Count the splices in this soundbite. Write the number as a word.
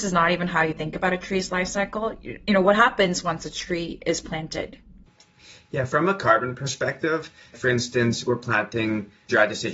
one